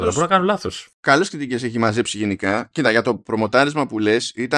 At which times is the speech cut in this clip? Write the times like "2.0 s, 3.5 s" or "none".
none